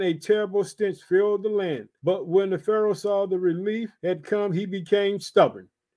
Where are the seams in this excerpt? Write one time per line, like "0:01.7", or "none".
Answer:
0:02.0
0:04.0